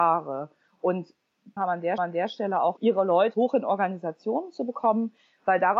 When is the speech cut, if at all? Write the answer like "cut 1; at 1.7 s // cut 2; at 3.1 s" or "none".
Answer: cut 1; at 1.6 s // cut 2; at 2.0 s // cut 3; at 2.8 s // cut 4; at 3.3 s